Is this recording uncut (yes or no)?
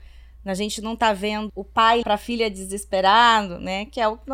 no